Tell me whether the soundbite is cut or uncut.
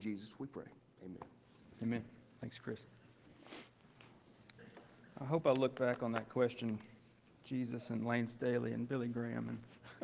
uncut